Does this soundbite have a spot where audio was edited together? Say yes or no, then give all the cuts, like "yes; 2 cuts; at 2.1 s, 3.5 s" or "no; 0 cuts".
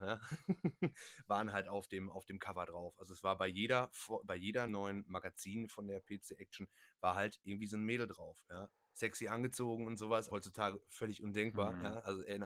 yes; 2 cuts; at 4.7 s, 10.3 s